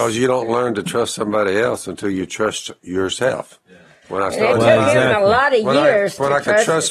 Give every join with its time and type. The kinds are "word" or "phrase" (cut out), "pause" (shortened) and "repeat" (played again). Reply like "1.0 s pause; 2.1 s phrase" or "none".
none